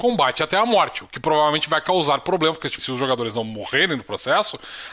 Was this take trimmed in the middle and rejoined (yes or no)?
yes